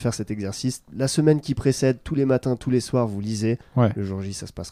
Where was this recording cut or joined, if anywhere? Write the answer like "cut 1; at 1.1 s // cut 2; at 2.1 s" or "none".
none